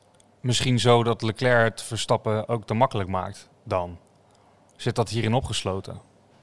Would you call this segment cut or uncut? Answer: uncut